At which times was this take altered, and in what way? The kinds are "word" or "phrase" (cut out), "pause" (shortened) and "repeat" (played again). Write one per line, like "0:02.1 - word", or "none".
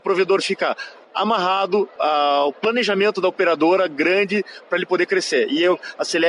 none

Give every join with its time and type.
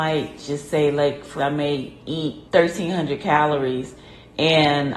0:01.4 - word
0:02.5 - pause

